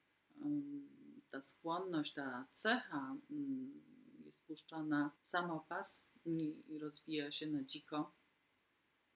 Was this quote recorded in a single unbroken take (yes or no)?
no